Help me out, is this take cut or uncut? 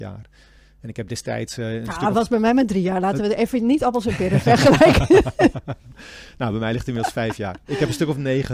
uncut